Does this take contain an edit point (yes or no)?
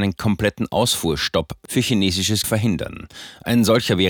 yes